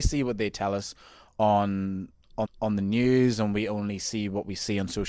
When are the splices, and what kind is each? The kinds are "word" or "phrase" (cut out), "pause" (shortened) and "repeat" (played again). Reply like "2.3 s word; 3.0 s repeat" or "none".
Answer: 2.4 s repeat

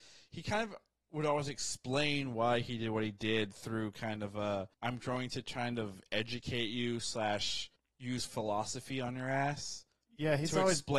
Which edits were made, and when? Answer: 4.7 s pause; 7.8 s pause

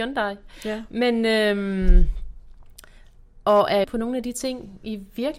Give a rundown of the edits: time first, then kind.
3.8 s phrase

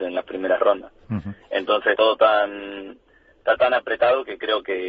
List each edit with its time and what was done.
1.9 s word; 3.6 s word

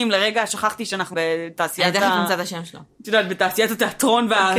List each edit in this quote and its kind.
1.1 s word

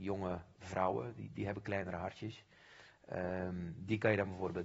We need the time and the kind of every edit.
1.3 s word

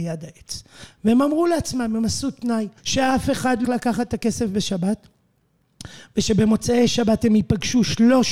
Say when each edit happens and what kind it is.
2.8 s pause; 3.6 s word

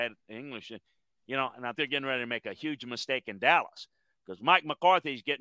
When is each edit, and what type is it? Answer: 1.7 s word

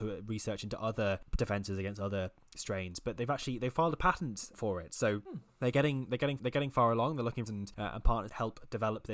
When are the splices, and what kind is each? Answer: 4.5 s word; 6.4 s repeat; 7.5 s phrase

